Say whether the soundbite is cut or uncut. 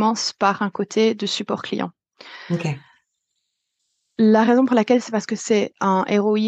uncut